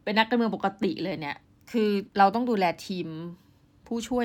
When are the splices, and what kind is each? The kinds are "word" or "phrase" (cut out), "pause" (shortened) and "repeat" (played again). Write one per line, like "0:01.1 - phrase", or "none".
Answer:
0:01.4 - pause
0:02.1 - pause

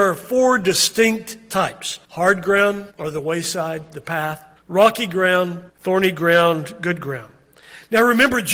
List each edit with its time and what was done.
0:02.0 - pause
0:02.9 - pause
0:04.6 - pause
0:05.7 - pause

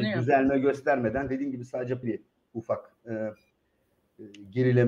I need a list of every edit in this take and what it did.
0:02.0 - word

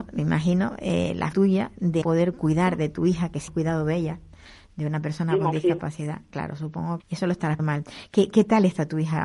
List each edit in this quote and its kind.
0:01.3 - word
0:02.0 - word
0:03.5 - word
0:07.0 - word
0:07.6 - word

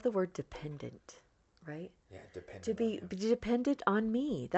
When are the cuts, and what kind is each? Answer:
none

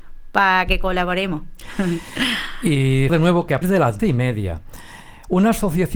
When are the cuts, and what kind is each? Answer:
0:03.1 - word
0:03.6 - word
0:04.0 - word

